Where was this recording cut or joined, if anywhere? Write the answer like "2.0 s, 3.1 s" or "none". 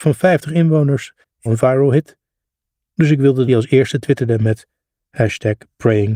1.5 s, 3.5 s